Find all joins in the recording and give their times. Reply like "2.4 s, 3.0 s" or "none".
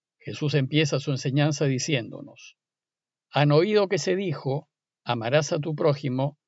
none